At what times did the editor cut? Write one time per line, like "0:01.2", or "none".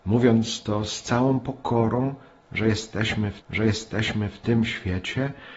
0:03.4